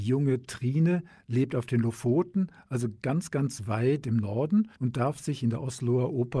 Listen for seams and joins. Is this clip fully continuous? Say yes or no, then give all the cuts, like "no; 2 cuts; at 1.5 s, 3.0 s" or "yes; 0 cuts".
no; 1 cut; at 4.8 s